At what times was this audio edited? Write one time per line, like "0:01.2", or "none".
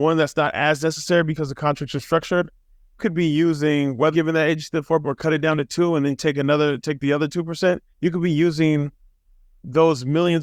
0:03.0
0:04.1
0:05.0
0:07.9